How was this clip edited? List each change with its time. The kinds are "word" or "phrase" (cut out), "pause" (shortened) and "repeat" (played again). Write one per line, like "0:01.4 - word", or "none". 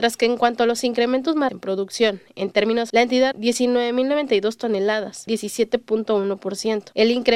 0:01.5 - word
0:02.9 - word
0:03.3 - word
0:05.3 - word